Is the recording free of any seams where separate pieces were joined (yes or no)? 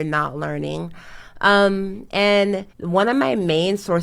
no